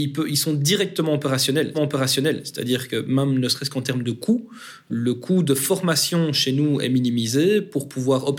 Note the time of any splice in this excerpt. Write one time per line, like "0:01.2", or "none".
0:01.7
0:04.9